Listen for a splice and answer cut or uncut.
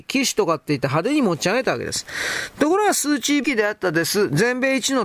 cut